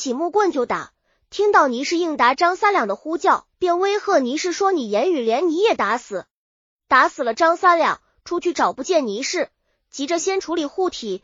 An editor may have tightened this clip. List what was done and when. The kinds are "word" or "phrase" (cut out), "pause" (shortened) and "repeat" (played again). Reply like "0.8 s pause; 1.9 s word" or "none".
3.5 s pause